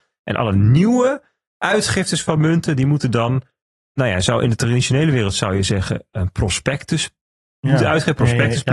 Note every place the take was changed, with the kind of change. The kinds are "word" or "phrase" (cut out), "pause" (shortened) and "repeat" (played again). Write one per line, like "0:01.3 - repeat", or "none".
none